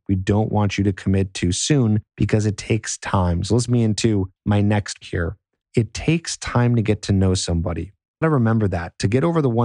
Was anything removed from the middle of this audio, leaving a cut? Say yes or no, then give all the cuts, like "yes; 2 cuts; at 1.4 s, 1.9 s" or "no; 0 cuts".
yes; 6 cuts; at 2.1 s, 3.7 s, 4.4 s, 5.0 s, 5.6 s, 8.2 s